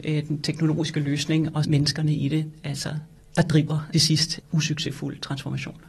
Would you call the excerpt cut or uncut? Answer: cut